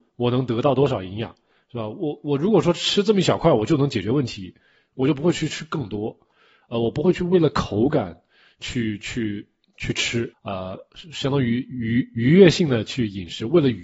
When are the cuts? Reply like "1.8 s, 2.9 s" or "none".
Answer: 10.3 s